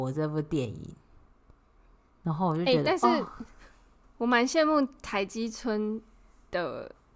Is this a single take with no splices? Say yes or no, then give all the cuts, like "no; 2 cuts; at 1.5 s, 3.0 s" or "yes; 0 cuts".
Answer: yes; 0 cuts